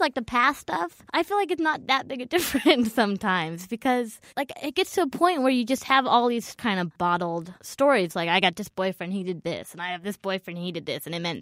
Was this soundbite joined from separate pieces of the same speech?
yes; 3 cuts; at 1.1 s, 4.3 s, 7.6 s

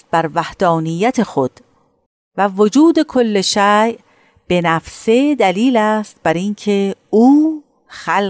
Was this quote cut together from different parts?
no; 0 cuts

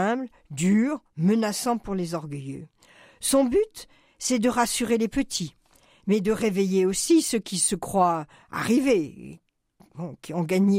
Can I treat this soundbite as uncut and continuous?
yes; 0 cuts

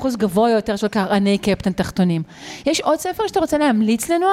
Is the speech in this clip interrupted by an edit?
no; 0 cuts

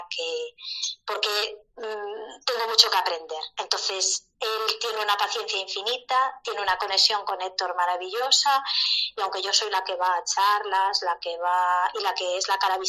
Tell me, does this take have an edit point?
no; 0 cuts

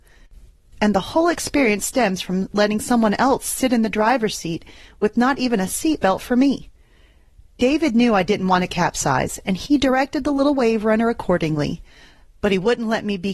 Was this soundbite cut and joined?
no; 0 cuts

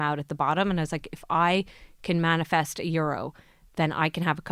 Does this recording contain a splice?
no; 0 cuts

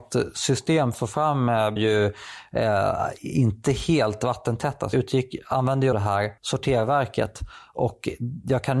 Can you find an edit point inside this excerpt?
yes; 5 cuts; at 0.9 s, 1.8 s, 4.9 s, 5.9 s, 6.4 s

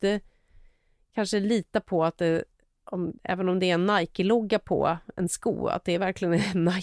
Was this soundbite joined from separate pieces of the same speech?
no; 0 cuts

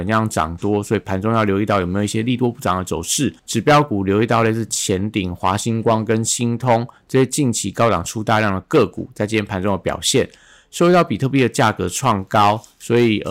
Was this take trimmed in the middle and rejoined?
yes; 1 cut; at 3.4 s

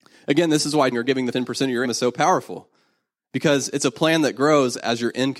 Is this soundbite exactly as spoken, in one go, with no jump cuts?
no; 3 cuts; at 0.9 s, 1.3 s, 1.8 s

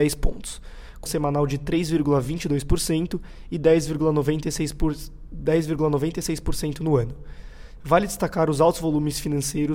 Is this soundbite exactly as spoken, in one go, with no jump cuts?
no; 1 cut; at 1.1 s

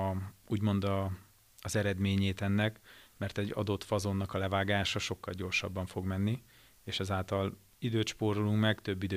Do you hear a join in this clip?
no; 0 cuts

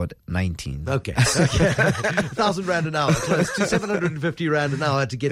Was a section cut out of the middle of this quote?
no; 0 cuts

